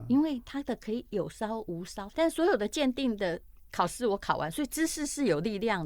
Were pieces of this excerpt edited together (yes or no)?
yes